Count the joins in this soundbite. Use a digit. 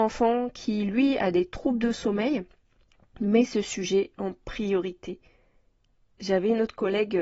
0